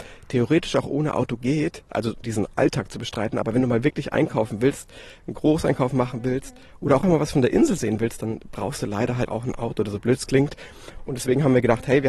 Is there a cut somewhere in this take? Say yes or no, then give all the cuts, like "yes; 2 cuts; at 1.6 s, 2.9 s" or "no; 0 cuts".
yes; 3 cuts; at 2.2 s, 7.0 s, 9.3 s